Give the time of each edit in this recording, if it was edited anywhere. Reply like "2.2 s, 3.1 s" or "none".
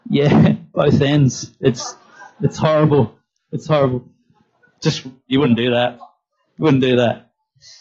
none